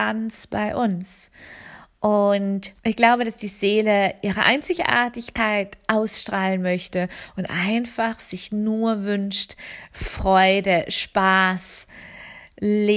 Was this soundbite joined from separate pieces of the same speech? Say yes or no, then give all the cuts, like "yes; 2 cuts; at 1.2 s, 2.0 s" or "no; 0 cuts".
yes; 1 cut; at 2.8 s